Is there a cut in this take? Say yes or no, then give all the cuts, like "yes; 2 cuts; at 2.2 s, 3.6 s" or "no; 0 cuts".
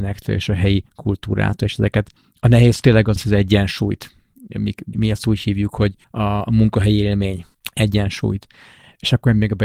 yes; 5 cuts; at 2.2 s, 3.2 s, 4.9 s, 6.0 s, 7.5 s